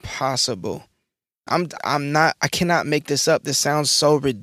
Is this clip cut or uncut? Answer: cut